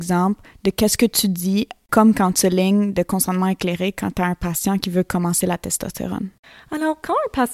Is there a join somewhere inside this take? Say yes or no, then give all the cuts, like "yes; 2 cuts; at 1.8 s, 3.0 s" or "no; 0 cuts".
no; 0 cuts